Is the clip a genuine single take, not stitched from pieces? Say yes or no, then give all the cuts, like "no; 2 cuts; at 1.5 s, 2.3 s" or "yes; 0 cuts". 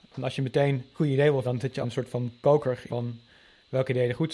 no; 4 cuts; at 0.9 s, 1.4 s, 1.8 s, 2.9 s